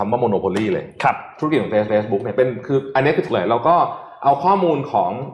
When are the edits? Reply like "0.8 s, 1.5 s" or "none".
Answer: 1.9 s, 3.3 s